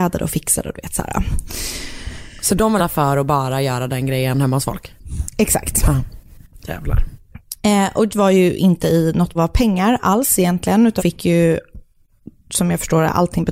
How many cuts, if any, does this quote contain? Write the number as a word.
four